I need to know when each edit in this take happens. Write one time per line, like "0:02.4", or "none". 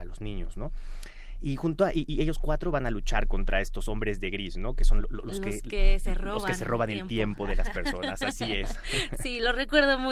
0:05.0